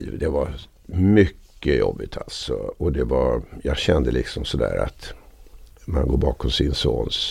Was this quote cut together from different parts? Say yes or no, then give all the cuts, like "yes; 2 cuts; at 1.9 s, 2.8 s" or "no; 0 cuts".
no; 0 cuts